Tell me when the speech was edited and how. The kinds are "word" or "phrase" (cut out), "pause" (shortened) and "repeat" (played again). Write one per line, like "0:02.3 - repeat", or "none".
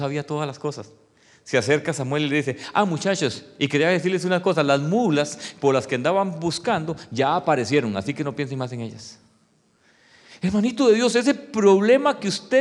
none